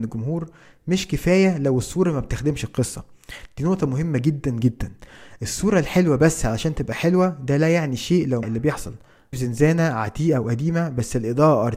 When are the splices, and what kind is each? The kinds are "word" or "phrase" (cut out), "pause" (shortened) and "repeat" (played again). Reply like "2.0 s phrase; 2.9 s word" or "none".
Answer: 8.4 s phrase; 9.3 s phrase